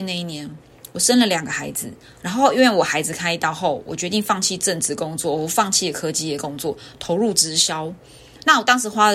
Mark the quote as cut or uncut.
uncut